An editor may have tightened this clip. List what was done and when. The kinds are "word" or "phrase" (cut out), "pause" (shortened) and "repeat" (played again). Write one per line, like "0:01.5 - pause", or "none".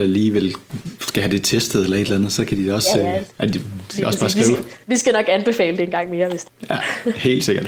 0:04.8 - pause